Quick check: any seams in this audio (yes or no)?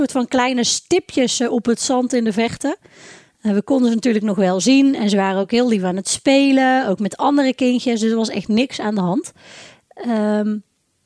no